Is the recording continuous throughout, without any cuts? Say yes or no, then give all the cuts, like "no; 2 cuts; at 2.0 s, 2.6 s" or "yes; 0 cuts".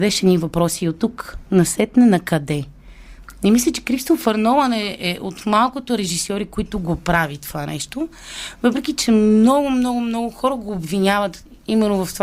yes; 0 cuts